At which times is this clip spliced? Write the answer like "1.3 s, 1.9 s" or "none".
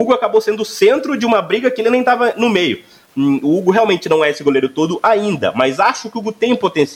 none